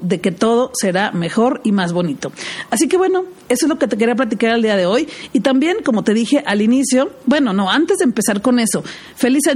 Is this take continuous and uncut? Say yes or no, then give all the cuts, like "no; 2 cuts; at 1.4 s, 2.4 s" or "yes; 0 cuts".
yes; 0 cuts